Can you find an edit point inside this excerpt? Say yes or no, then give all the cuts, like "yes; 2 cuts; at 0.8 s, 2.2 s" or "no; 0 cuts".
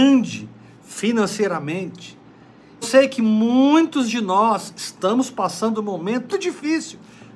yes; 2 cuts; at 2.8 s, 6.3 s